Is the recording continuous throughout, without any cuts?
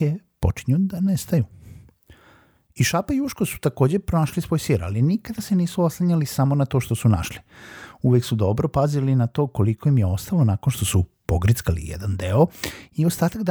yes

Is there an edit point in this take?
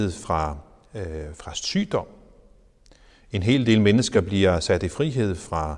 no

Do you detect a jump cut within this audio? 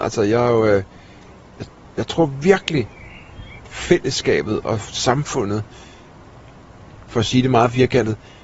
yes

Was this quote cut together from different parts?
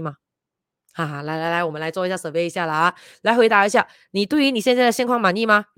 no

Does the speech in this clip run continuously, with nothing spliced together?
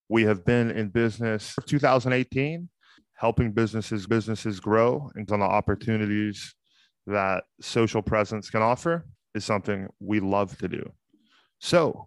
no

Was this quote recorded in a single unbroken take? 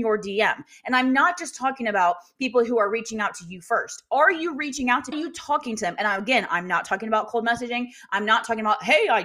no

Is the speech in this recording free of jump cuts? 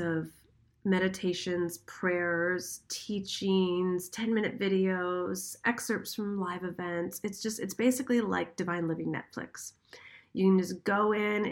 yes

